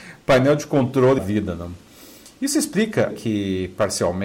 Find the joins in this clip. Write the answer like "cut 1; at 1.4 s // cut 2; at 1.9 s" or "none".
cut 1; at 1.2 s // cut 2; at 3.1 s

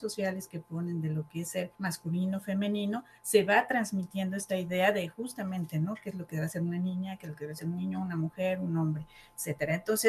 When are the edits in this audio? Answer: cut 1; at 1.7 s

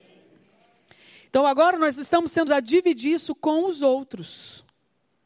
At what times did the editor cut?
cut 1; at 2.5 s

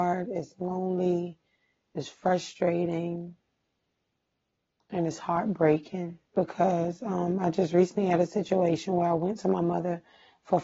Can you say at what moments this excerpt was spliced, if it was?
cut 1; at 6.3 s

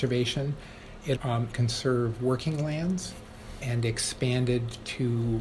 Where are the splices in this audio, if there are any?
cut 1; at 1.2 s // cut 2; at 1.5 s

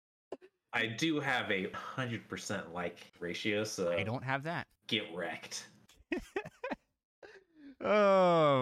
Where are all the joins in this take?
cut 1; at 1.7 s // cut 2; at 3.1 s // cut 3; at 4.8 s

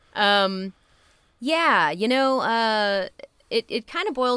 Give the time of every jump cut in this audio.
none

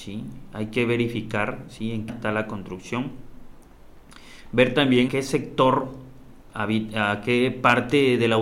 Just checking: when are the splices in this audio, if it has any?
cut 1; at 2.1 s // cut 2; at 5.1 s

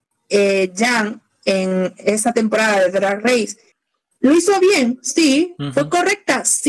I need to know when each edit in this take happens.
none

